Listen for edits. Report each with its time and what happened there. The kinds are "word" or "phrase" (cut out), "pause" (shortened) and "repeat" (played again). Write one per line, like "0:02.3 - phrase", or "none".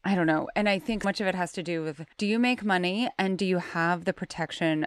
0:01.0 - word
0:02.1 - pause

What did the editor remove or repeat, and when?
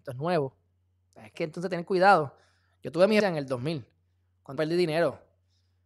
0:01.3 - word
0:03.2 - word
0:04.6 - word

